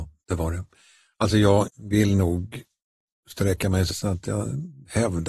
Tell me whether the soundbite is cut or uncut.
cut